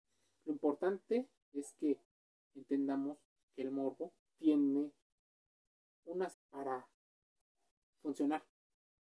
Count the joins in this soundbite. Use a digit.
3